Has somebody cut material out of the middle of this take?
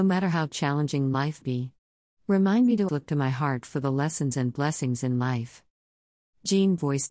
yes; 2 cuts; at 1.4 s, 2.9 s

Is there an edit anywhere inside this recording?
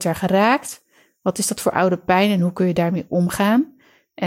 no; 0 cuts

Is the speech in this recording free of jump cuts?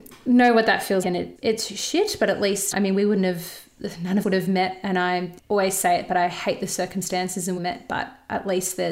no; 6 cuts; at 1.0 s, 1.4 s, 2.7 s, 4.2 s, 5.4 s, 7.6 s

